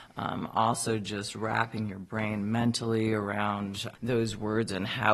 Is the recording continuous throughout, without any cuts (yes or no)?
no